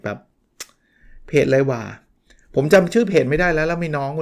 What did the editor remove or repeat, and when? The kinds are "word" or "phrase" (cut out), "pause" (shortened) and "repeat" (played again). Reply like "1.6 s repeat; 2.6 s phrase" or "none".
none